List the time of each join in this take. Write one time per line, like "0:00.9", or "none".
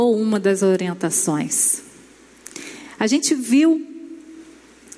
none

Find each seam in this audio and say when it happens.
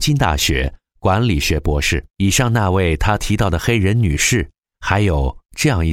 0:02.1

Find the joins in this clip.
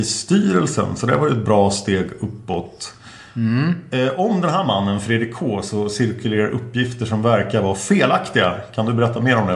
none

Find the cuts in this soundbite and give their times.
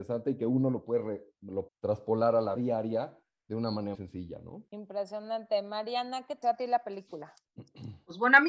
0:01.7
0:02.6
0:03.9
0:06.4

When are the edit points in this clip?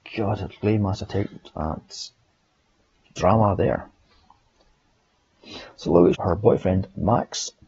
0:06.1

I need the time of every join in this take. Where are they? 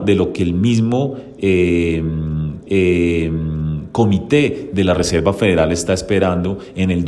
0:02.6

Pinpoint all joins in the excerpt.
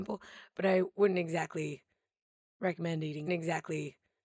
0:03.3

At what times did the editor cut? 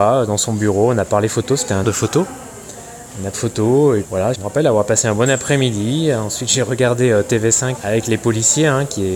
0:01.8
0:03.3
0:04.0
0:04.3
0:07.8

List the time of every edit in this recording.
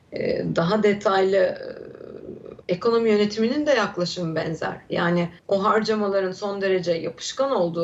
0:02.6
0:05.4

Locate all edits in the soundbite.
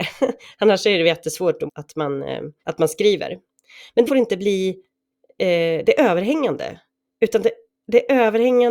0:01.7
0:02.6
0:04.1

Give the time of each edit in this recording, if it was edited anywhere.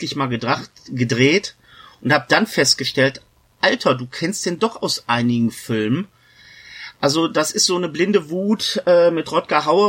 none

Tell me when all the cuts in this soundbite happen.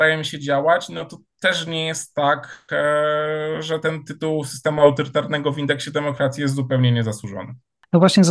none

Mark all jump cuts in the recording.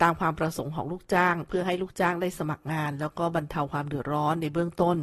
none

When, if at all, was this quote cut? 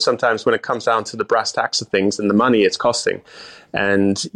none

